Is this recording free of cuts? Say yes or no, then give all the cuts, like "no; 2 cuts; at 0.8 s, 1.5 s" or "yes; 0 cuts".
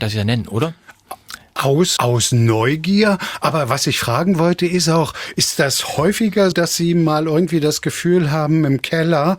no; 2 cuts; at 2.0 s, 6.5 s